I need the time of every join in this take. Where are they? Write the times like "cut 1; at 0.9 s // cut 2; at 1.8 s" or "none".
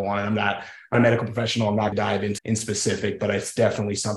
cut 1; at 0.9 s // cut 2; at 1.9 s // cut 3; at 2.4 s